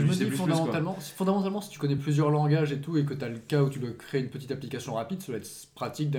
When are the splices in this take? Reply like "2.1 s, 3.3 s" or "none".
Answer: none